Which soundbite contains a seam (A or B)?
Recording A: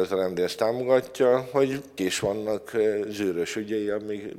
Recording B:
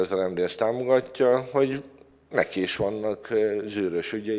A